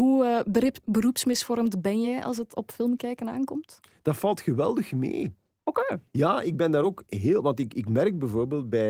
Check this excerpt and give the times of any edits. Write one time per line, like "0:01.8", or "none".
none